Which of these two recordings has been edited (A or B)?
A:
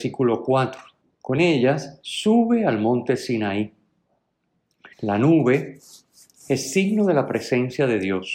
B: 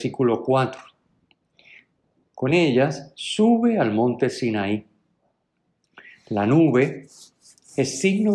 A